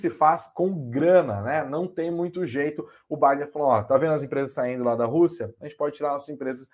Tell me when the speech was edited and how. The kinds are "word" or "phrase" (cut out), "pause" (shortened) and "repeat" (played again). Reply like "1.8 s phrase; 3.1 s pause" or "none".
none